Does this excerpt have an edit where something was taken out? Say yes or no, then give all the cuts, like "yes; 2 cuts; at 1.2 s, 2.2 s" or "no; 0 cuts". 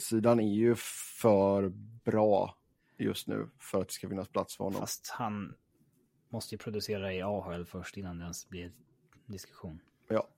no; 0 cuts